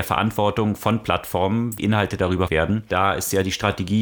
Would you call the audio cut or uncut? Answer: cut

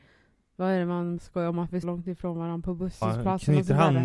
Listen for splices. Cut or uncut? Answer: cut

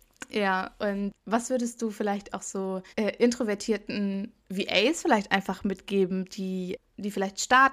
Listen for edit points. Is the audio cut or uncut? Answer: cut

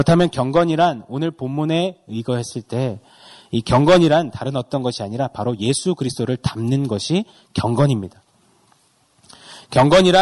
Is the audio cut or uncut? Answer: uncut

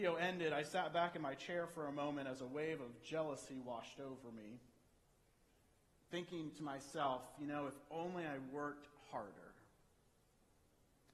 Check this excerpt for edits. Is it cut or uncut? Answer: uncut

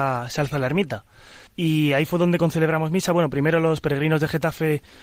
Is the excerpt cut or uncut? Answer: cut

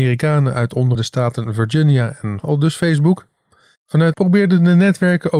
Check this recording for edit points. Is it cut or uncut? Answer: cut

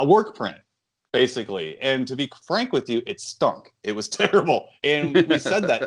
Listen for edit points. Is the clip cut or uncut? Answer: cut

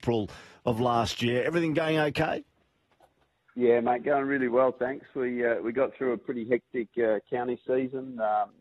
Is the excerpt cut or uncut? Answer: uncut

